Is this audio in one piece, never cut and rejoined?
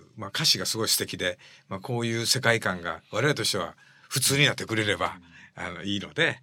yes; 0 cuts

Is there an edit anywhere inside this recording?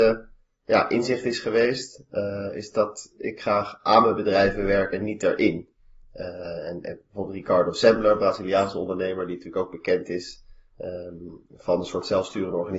no; 0 cuts

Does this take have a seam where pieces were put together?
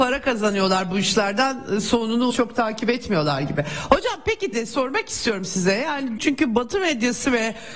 yes; 3 cuts; at 2.3 s, 4.5 s, 6.2 s

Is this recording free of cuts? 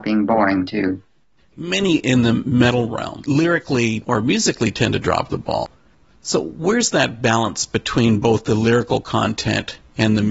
yes; 0 cuts

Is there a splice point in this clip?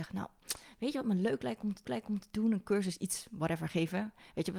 yes; 1 cut; at 1.8 s

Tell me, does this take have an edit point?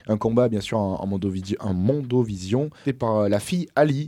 yes; 1 cut; at 2.8 s

